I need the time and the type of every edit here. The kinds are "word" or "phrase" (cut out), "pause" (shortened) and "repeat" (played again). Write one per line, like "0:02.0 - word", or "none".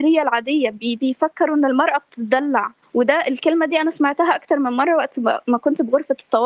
0:02.8 - pause

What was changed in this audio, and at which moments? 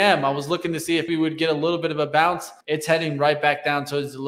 0:01.1 - word
0:02.6 - pause

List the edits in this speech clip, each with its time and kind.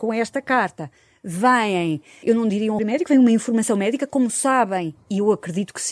0:02.2 - word
0:02.8 - word

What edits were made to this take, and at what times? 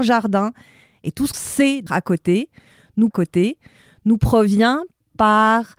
0:01.3 - word
0:01.9 - word
0:03.1 - repeat

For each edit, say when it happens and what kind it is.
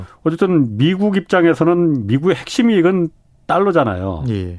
none

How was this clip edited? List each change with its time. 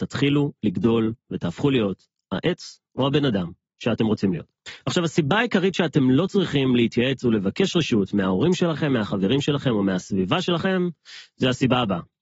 none

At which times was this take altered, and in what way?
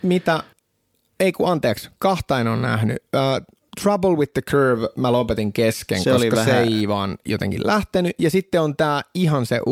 none

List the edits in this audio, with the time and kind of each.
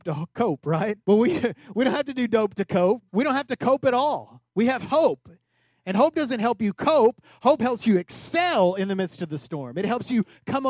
0:01.0 - pause
0:03.1 - pause

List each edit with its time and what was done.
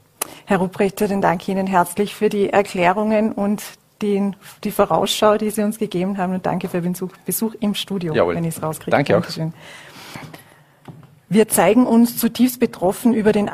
none

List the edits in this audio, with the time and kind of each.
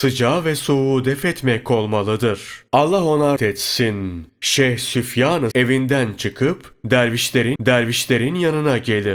0:02.7 - pause
0:03.4 - word
0:05.5 - word
0:07.6 - repeat

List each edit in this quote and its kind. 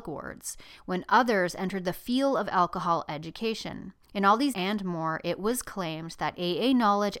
0:04.0 - pause
0:04.5 - word

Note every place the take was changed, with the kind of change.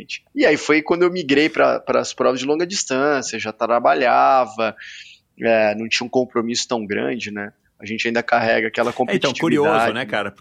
none

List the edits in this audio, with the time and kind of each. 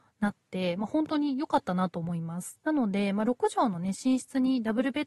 0:02.6 - pause

